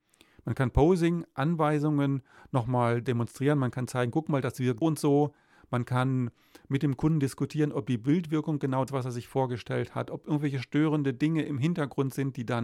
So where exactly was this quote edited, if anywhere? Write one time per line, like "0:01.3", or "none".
0:04.8
0:08.9